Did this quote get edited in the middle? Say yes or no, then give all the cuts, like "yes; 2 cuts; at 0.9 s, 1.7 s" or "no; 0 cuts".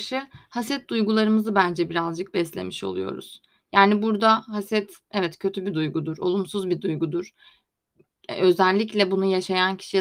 no; 0 cuts